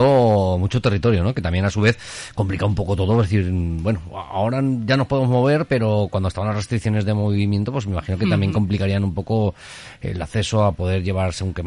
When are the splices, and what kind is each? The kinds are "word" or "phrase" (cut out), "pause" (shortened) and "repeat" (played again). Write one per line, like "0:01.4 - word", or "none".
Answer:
none